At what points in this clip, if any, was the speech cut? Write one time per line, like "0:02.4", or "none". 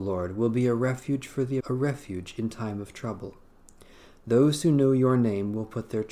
0:01.6